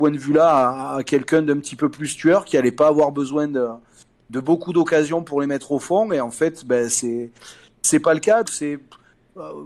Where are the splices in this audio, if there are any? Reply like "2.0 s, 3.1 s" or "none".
8.5 s